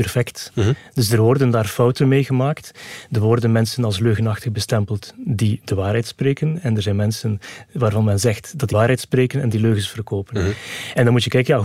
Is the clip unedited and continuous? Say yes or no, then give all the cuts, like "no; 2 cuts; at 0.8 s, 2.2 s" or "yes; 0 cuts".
no; 1 cut; at 8.7 s